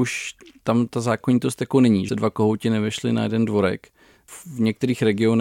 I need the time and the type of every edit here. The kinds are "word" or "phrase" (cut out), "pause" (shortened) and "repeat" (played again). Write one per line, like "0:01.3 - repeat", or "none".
0:02.1 - phrase